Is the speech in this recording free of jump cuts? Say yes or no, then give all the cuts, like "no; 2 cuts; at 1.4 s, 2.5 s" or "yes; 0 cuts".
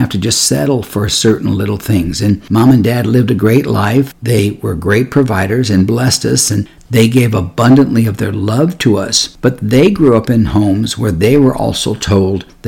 yes; 0 cuts